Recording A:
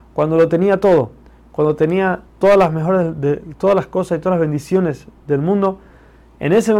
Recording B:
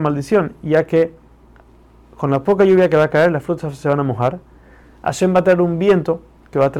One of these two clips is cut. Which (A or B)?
A